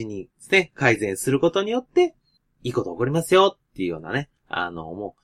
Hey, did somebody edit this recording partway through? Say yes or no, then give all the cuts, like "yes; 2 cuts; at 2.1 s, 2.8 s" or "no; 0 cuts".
no; 0 cuts